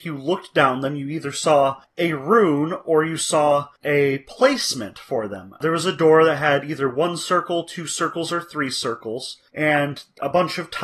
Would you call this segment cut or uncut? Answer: uncut